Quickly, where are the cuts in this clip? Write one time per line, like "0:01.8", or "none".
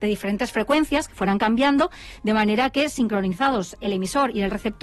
none